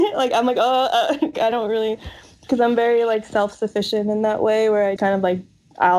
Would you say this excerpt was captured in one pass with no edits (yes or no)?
no